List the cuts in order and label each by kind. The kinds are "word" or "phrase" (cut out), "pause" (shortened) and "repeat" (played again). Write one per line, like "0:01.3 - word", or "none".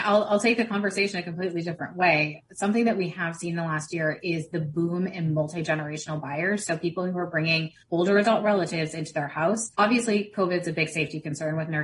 0:07.8 - pause
0:09.7 - pause